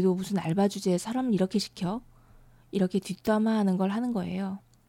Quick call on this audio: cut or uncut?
uncut